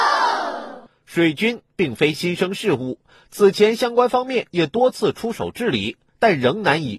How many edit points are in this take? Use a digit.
0